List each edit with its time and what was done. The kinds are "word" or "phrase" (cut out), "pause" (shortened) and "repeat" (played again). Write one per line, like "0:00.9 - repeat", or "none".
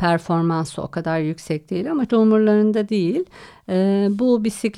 0:02.1 - word